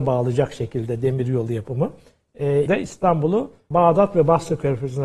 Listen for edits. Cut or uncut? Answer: cut